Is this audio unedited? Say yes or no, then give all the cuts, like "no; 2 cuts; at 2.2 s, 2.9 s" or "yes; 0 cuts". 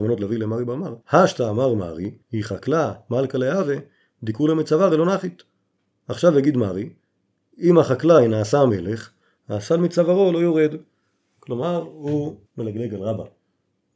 no; 3 cuts; at 1.0 s, 2.2 s, 12.5 s